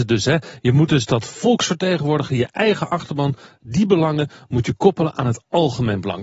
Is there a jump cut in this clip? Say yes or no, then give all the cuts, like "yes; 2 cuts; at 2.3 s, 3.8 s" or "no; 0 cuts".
no; 0 cuts